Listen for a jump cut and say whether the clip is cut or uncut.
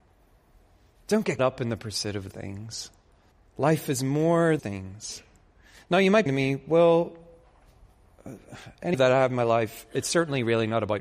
cut